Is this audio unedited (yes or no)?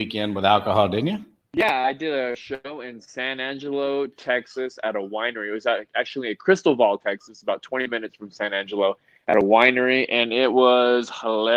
yes